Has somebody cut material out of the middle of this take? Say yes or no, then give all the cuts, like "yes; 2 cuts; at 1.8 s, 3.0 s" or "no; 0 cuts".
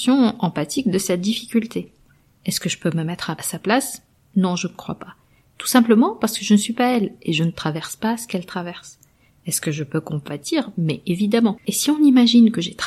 no; 0 cuts